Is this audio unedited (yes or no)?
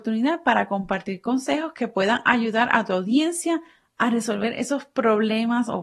yes